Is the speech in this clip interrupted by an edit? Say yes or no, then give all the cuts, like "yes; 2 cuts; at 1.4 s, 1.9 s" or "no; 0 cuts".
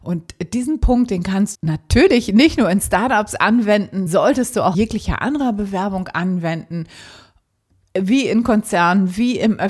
yes; 3 cuts; at 1.5 s, 4.1 s, 4.7 s